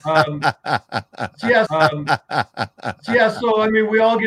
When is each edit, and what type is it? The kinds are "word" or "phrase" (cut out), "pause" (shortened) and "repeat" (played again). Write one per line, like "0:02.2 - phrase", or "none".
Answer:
0:01.7 - repeat